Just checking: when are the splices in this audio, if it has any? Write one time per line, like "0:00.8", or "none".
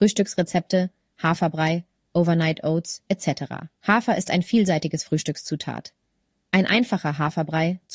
0:03.8

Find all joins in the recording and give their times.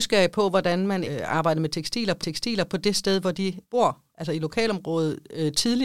0:01.0
0:02.2
0:03.6

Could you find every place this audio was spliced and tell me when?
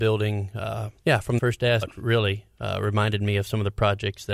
0:01.0
0:01.4
0:01.8

